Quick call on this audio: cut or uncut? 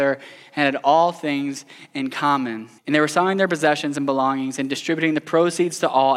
cut